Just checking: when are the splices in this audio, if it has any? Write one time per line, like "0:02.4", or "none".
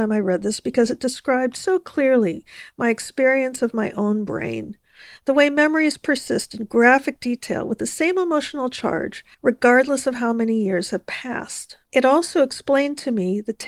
0:09.3
0:11.8